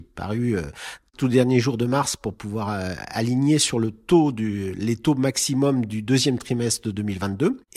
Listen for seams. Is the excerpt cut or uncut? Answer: uncut